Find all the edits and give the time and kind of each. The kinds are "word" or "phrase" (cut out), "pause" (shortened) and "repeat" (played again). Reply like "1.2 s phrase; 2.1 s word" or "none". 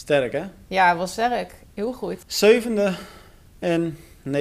2.2 s pause